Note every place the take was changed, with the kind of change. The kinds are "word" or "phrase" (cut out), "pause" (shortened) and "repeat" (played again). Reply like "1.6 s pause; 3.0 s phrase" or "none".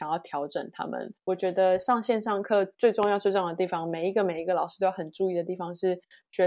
1.2 s pause